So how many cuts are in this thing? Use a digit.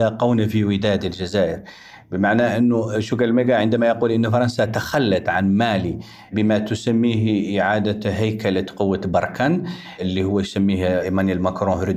0